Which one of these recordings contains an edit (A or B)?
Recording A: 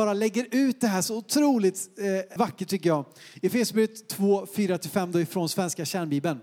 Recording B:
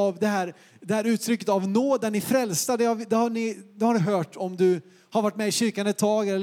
A